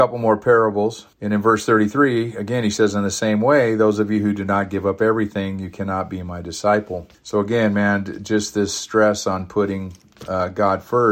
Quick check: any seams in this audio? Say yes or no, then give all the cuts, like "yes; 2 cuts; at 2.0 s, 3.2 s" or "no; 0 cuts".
yes; 2 cuts; at 1.1 s, 7.1 s